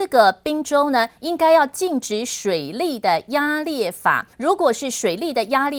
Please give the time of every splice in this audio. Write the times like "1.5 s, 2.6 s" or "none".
4.3 s